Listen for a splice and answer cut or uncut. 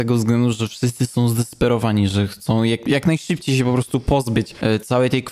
uncut